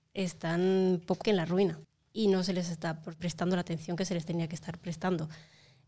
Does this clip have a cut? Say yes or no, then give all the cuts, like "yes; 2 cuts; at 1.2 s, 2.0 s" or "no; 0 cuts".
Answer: yes; 3 cuts; at 1.2 s, 1.8 s, 3.2 s